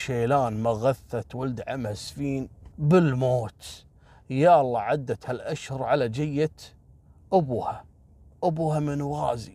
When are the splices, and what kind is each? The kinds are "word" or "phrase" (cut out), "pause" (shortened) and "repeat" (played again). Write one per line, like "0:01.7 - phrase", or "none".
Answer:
0:02.7 - pause